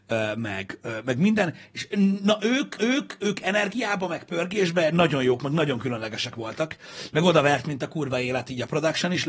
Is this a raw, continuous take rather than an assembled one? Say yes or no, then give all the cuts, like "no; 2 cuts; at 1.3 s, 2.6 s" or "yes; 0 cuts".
no; 1 cut; at 2.8 s